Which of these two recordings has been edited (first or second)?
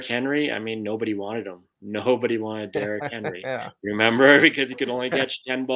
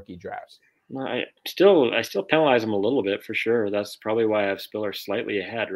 second